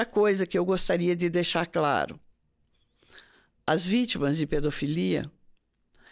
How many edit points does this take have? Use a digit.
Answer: 0